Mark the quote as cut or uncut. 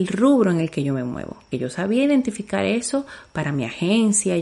cut